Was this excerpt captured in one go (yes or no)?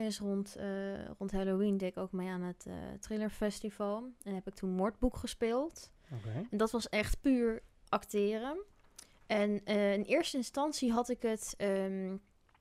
yes